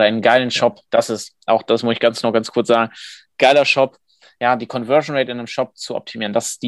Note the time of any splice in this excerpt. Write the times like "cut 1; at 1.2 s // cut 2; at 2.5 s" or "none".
none